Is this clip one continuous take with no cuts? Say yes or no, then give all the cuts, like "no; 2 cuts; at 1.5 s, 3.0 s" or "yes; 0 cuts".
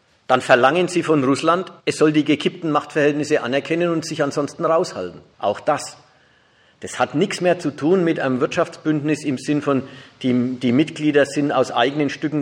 no; 1 cut; at 1.8 s